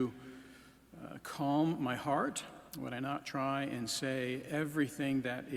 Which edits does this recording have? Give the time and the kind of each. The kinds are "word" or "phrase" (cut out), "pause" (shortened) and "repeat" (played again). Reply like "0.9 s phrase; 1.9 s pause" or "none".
2.7 s pause